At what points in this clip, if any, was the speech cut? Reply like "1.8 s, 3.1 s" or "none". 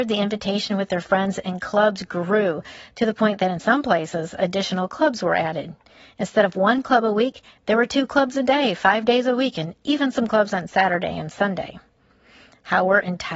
none